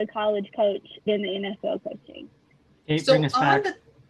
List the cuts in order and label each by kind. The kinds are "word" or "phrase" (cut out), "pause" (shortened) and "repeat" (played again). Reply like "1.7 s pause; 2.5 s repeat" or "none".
1.1 s word; 2.5 s pause